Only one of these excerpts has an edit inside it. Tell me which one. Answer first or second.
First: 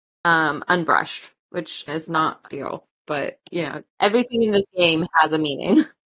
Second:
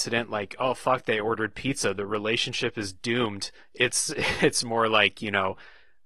first